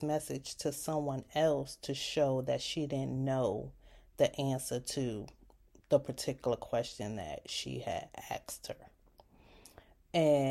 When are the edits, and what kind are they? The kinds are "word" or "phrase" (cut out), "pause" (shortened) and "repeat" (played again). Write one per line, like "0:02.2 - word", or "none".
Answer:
none